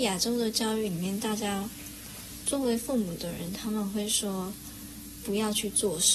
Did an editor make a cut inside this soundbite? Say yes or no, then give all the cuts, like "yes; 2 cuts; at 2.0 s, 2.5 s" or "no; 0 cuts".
yes; 1 cut; at 2.4 s